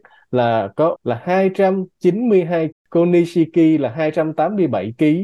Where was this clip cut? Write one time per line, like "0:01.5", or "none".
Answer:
0:01.0
0:02.7